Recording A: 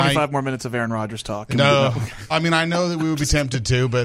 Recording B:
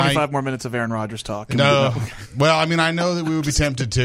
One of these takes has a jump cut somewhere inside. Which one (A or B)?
A